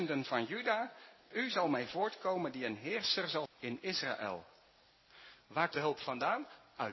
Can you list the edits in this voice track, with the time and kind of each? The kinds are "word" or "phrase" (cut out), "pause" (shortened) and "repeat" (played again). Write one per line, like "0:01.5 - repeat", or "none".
0:01.3 - word
0:03.5 - word
0:05.7 - word